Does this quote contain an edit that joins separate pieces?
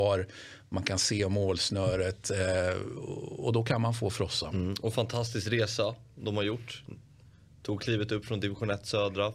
no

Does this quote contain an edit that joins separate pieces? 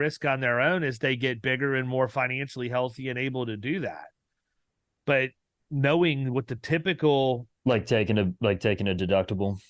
no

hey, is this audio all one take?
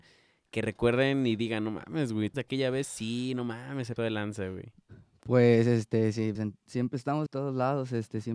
no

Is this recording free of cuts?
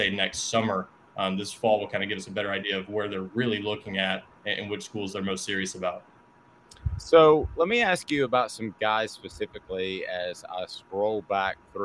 yes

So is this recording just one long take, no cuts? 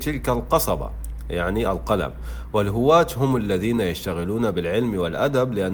yes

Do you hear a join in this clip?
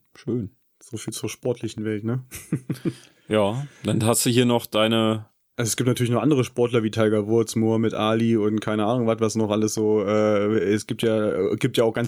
no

